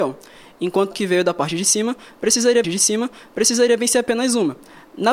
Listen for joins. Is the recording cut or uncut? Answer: cut